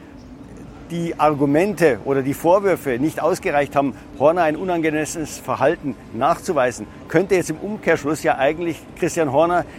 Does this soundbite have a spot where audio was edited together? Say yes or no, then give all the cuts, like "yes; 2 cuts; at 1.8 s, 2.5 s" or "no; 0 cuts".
no; 0 cuts